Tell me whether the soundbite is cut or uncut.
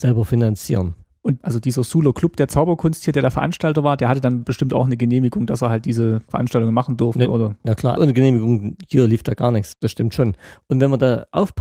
cut